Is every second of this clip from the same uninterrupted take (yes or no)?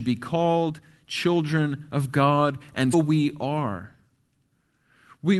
no